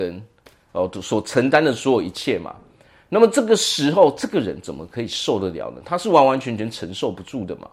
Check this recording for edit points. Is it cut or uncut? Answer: uncut